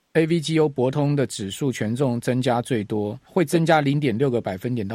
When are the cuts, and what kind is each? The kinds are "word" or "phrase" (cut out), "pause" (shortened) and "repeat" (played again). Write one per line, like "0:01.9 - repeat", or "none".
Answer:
0:03.2 - pause